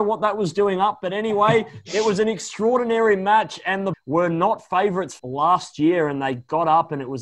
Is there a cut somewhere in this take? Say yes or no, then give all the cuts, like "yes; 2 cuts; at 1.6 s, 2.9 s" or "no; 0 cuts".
yes; 2 cuts; at 3.9 s, 5.2 s